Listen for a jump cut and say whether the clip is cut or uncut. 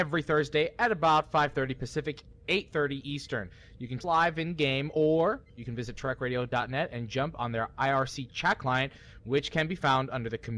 cut